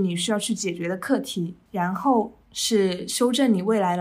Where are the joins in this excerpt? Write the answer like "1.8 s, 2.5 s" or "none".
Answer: 2.4 s

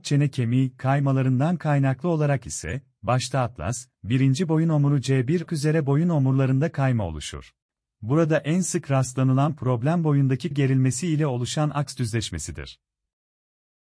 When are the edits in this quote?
5.5 s, 7.6 s, 10.5 s

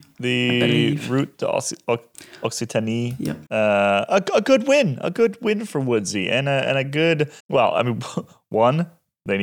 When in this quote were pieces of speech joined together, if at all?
3.5 s, 7.4 s

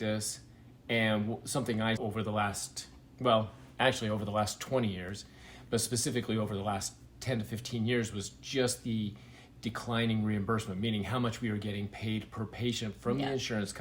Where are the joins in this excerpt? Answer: 2.0 s

